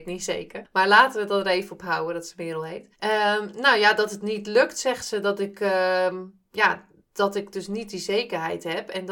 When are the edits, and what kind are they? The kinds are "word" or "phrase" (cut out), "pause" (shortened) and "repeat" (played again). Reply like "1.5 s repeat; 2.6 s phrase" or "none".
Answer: 2.9 s pause